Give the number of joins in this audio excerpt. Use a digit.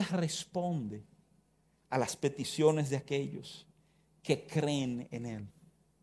0